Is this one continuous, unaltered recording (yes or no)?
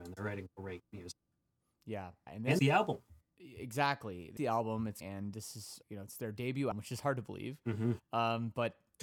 no